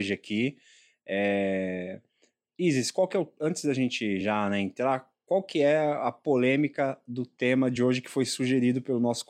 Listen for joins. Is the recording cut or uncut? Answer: uncut